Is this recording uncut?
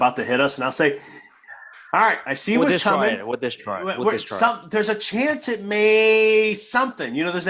yes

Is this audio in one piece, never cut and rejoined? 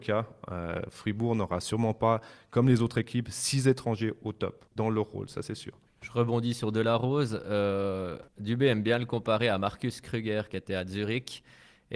no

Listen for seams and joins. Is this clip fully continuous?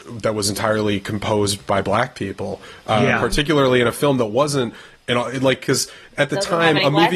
yes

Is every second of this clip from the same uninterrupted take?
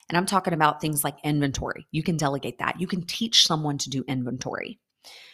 yes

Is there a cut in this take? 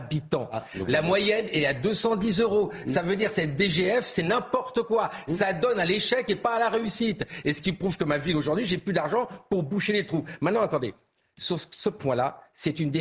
no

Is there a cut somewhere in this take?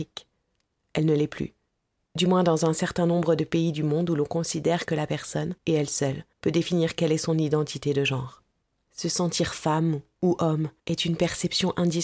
yes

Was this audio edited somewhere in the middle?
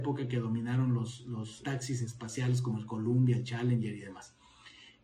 yes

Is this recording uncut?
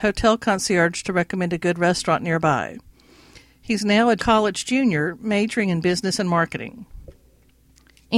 yes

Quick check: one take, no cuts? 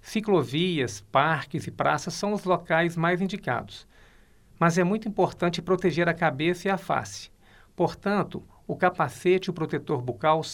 yes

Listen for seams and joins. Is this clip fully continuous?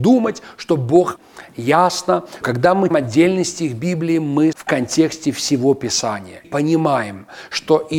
no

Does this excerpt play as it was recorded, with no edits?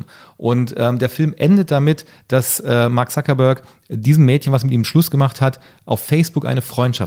yes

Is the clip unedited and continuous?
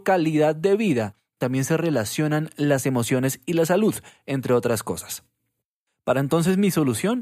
yes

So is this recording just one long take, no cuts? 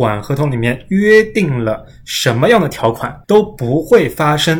no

